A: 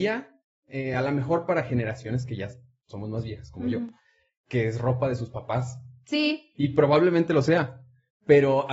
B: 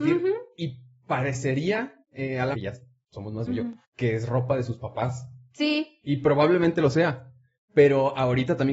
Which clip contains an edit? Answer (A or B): B